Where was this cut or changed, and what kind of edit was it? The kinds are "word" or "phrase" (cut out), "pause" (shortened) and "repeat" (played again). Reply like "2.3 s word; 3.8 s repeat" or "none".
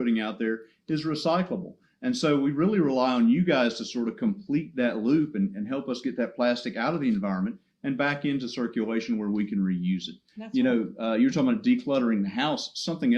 none